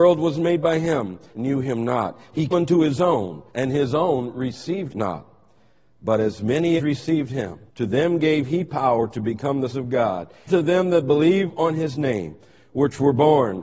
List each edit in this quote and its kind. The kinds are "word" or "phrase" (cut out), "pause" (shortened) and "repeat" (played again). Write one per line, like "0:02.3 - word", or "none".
0:01.3 - phrase
0:02.5 - word
0:03.5 - pause
0:04.9 - word
0:06.8 - word
0:07.7 - pause
0:09.7 - word
0:10.5 - word